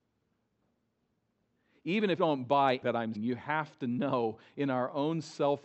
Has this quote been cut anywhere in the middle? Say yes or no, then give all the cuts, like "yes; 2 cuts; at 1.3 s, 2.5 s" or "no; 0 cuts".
yes; 3 cuts; at 2.2 s, 2.8 s, 3.1 s